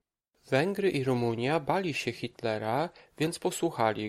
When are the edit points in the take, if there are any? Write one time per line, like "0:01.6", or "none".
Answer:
none